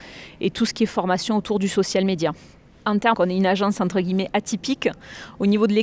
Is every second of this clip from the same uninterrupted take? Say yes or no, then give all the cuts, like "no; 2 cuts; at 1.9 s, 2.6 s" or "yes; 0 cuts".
no; 1 cut; at 3.1 s